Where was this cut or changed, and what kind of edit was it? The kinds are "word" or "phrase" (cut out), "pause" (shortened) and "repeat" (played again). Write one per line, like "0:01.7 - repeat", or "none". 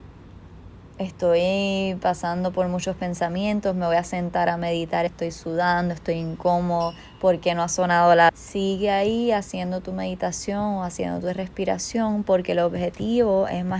0:05.1 - word
0:08.3 - word